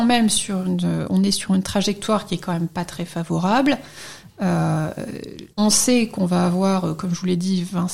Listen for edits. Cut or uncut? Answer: cut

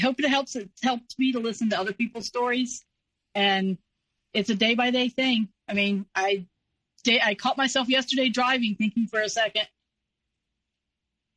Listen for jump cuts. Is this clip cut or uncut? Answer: uncut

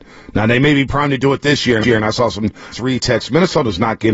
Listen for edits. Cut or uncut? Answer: cut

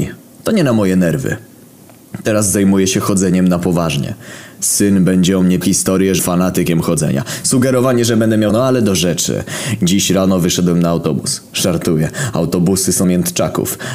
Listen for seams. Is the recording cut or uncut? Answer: cut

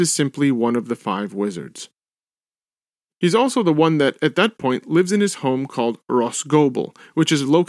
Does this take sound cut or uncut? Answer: uncut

